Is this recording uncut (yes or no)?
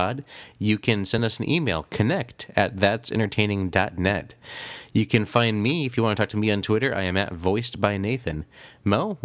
yes